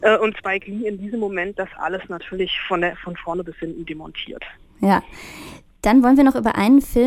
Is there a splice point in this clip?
no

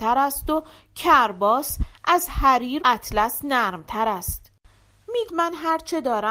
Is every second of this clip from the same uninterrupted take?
no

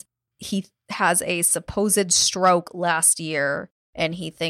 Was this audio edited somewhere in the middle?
no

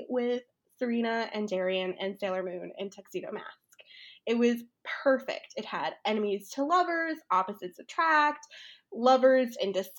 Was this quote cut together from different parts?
no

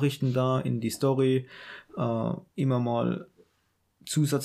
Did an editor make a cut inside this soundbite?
no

